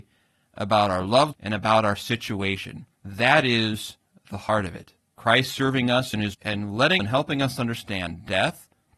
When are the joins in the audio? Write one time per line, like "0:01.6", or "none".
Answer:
0:01.3
0:02.9
0:04.1
0:05.0
0:06.3
0:07.0